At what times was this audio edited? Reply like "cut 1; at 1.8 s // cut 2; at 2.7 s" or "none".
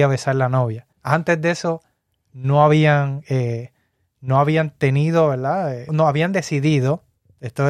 cut 1; at 0.9 s // cut 2; at 5.9 s

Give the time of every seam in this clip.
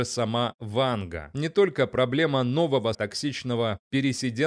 cut 1; at 2.9 s

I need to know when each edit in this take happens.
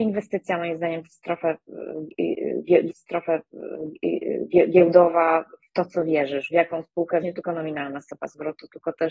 cut 1; at 2.9 s // cut 2; at 7.2 s

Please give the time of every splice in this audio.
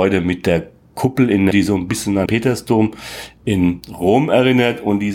cut 1; at 1.5 s // cut 2; at 2.3 s

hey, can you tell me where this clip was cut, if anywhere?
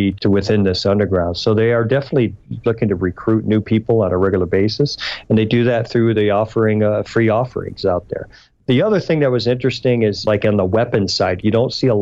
none

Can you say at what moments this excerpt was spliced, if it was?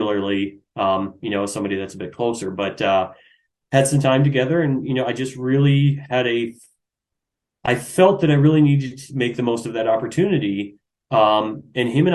none

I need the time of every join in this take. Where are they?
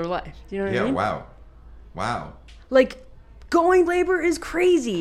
cut 1; at 3.9 s

